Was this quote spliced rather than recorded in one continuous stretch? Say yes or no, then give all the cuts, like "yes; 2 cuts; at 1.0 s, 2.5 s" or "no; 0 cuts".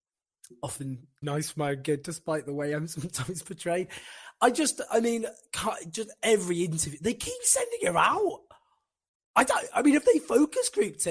yes; 1 cut; at 1.2 s